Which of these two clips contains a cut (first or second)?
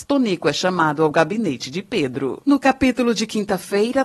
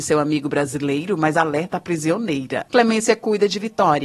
second